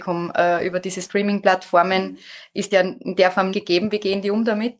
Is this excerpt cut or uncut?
cut